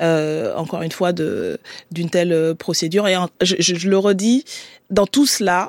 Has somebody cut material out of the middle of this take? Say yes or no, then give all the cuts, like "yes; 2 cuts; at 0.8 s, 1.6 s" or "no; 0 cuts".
yes; 1 cut; at 3.3 s